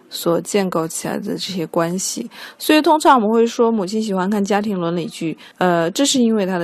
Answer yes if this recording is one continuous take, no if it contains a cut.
no